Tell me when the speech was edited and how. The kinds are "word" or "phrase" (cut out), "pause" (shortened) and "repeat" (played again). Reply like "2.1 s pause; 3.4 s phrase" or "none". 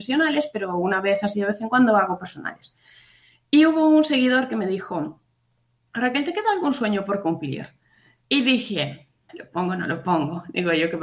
9.3 s word